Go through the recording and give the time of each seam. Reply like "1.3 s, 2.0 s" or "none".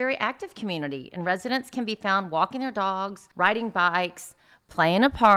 3.3 s